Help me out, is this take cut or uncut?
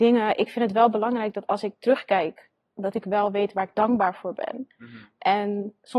uncut